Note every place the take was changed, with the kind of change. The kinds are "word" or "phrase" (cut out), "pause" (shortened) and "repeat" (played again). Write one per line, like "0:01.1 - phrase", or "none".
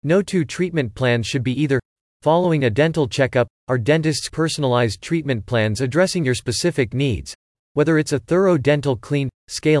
0:04.3 - word